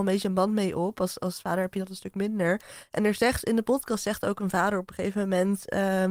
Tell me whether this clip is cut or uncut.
uncut